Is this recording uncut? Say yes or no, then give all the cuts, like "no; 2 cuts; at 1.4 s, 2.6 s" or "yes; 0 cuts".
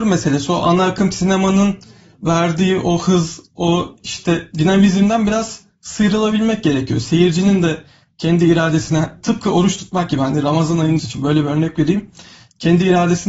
no; 1 cut; at 11.0 s